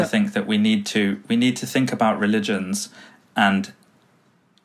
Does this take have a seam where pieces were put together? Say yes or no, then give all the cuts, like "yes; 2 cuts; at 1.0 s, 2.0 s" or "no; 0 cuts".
no; 0 cuts